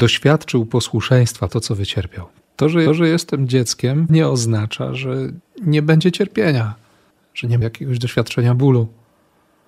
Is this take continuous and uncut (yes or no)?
no